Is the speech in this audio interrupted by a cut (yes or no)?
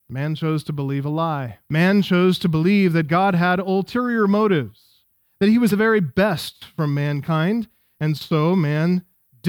yes